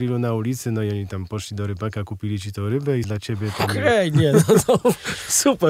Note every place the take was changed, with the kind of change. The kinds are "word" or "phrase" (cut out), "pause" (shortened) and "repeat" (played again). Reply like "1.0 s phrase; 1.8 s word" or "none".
3.0 s word